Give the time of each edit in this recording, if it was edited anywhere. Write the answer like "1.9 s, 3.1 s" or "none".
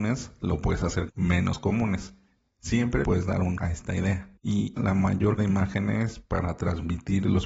1.1 s, 3.0 s, 3.6 s, 4.8 s, 5.4 s, 6.2 s